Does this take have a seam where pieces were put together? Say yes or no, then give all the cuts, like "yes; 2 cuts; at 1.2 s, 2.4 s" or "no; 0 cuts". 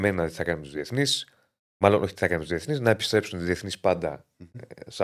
no; 0 cuts